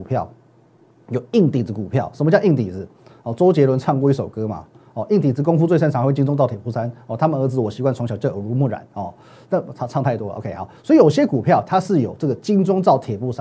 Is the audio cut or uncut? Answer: uncut